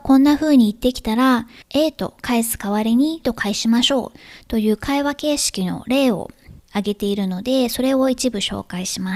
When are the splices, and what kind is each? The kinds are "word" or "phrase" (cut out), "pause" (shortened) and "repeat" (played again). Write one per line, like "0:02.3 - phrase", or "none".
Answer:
0:01.6 - pause
0:03.2 - word
0:06.6 - pause